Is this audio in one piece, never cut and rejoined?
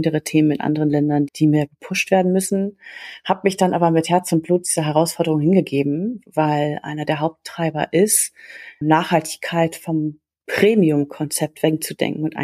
no; 2 cuts; at 1.3 s, 8.8 s

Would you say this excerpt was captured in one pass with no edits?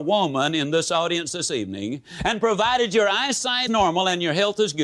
no; 1 cut; at 3.7 s

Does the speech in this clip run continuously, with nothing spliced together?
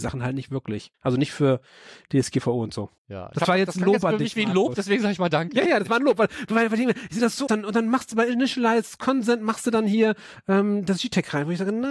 no; 4 cuts; at 0.9 s, 3.0 s, 5.7 s, 7.5 s

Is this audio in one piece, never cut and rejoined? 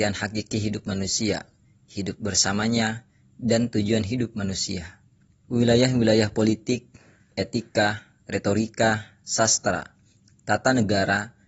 yes; 0 cuts

